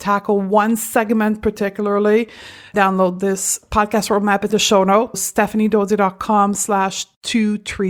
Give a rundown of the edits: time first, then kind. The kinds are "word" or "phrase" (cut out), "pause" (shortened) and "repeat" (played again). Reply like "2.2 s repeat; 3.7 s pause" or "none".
2.7 s phrase; 4.5 s word; 5.1 s word